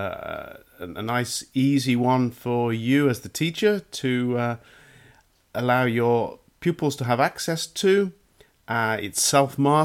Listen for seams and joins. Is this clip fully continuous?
yes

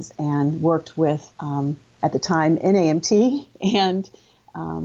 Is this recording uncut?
no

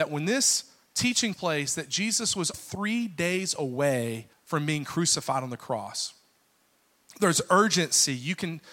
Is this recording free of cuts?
no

